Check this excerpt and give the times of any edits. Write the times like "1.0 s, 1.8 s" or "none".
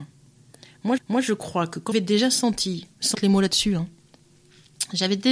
1.0 s, 1.9 s, 3.1 s